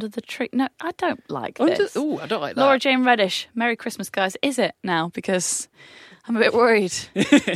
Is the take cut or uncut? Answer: uncut